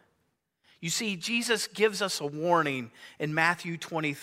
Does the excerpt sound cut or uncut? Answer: uncut